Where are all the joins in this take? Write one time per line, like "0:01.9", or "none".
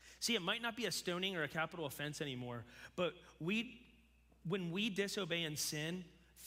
none

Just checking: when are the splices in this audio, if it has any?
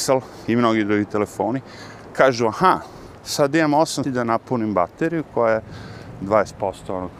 0:04.0

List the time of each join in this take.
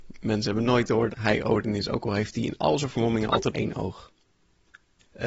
0:01.1
0:03.5

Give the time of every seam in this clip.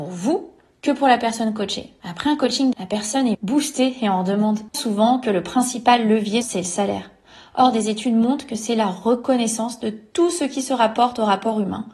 0:02.7
0:03.3
0:04.7
0:06.4

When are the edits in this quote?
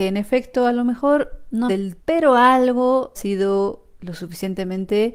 0:01.7
0:02.0
0:03.1

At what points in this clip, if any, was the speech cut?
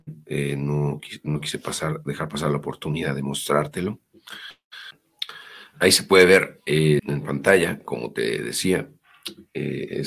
0:07.0

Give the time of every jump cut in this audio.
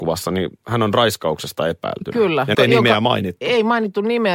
0:02.5

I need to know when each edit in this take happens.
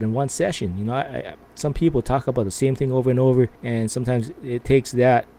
0:03.6

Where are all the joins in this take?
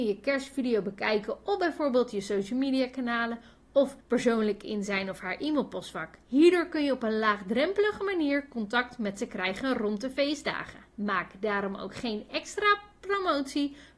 0:04.0
0:06.2
0:10.9

